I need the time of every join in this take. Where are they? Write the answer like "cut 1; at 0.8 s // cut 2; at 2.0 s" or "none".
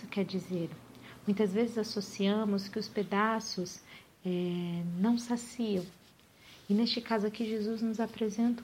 none